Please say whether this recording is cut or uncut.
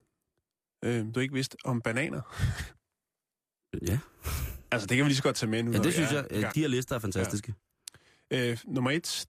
cut